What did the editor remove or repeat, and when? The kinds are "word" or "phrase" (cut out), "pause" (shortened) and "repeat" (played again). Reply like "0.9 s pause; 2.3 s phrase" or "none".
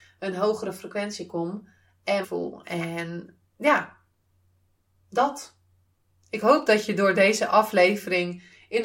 2.2 s phrase; 3.5 s pause